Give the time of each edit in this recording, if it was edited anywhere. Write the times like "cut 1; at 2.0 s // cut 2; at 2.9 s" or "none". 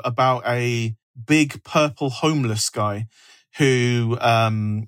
none